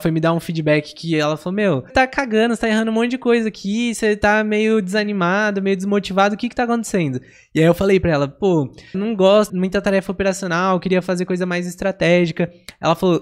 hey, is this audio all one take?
no; 3 cuts; at 1.9 s, 8.9 s, 9.5 s

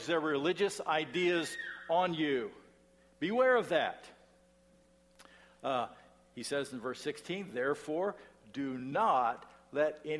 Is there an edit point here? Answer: no; 0 cuts

